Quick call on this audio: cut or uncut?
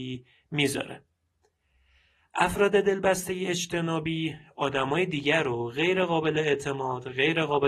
uncut